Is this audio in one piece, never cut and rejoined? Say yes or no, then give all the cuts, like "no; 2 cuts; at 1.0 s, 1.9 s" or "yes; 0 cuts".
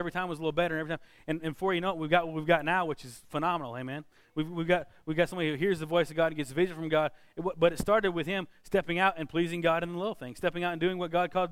yes; 0 cuts